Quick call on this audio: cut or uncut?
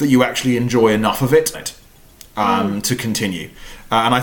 cut